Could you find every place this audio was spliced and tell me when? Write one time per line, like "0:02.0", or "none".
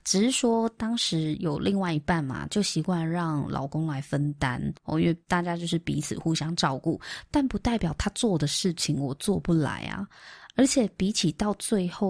0:04.8
0:05.2